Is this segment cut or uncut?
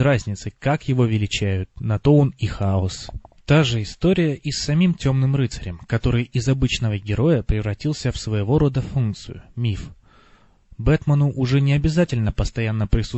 uncut